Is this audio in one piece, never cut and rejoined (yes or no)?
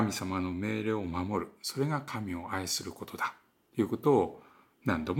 yes